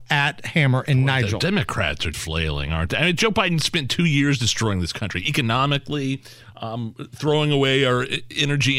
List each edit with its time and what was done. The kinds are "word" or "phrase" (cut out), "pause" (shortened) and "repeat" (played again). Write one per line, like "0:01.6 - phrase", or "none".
0:02.1 - word